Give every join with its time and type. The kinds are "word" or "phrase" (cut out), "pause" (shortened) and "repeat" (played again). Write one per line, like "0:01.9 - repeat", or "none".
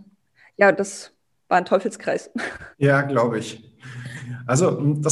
0:01.3 - pause
0:02.7 - pause